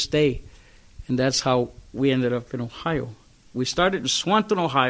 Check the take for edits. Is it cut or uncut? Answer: uncut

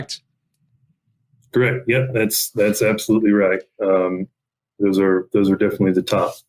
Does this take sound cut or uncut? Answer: uncut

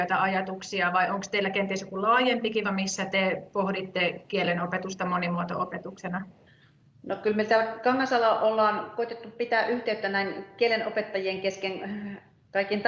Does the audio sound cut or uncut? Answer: cut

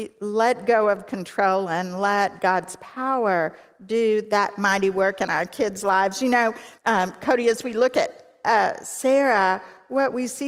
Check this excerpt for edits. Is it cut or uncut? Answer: cut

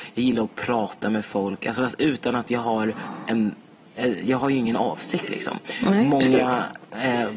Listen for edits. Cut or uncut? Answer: uncut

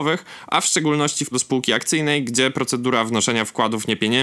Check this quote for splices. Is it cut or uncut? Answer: cut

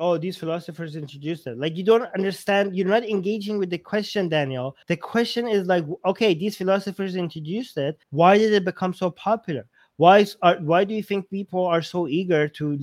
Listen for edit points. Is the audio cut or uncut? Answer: cut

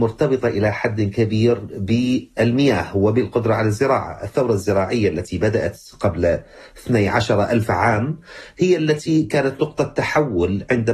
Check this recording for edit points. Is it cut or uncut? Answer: uncut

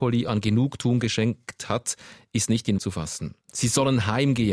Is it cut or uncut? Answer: cut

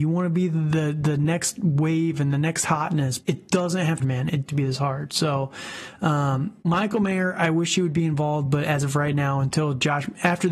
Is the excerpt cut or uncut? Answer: cut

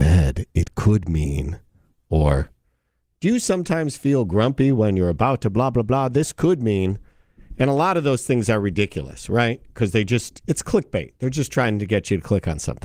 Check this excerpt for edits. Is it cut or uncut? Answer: uncut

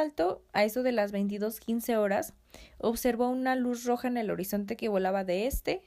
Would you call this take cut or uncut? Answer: uncut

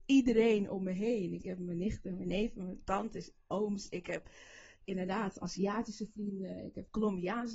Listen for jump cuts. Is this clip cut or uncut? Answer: uncut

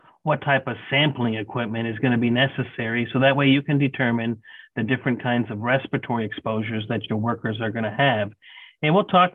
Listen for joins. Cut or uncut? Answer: uncut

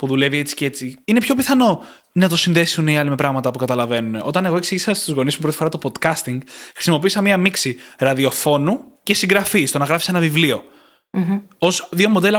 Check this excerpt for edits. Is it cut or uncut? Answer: cut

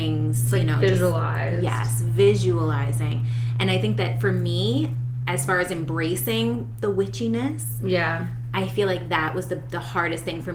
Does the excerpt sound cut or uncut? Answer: uncut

